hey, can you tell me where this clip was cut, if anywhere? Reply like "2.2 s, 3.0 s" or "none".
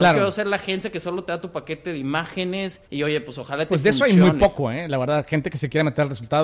2.8 s